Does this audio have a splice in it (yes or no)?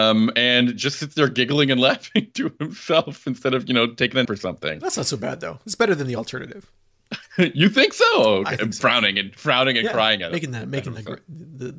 yes